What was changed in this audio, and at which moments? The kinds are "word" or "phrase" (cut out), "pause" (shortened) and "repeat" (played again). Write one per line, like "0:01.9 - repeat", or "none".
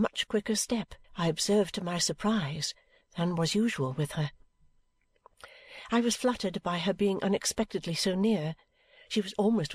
0:01.0 - pause